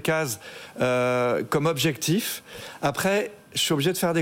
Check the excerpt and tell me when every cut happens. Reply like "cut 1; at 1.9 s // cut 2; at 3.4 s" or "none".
none